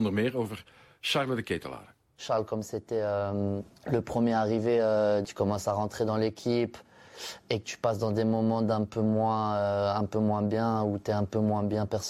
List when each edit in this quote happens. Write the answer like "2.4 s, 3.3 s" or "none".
2.0 s, 3.8 s